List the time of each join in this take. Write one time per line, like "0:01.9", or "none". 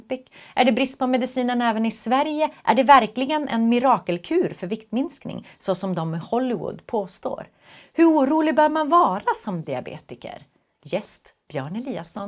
none